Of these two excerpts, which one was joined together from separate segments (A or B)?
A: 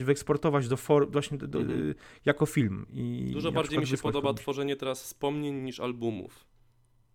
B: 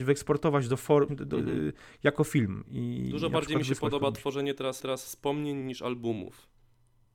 B